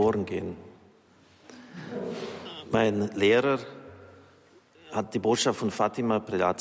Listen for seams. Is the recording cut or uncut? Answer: uncut